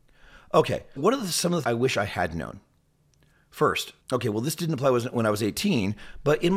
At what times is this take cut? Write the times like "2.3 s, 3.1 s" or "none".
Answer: 1.0 s, 1.6 s, 4.0 s